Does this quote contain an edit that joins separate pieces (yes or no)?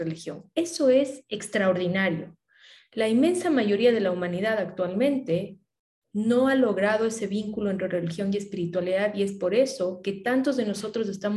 no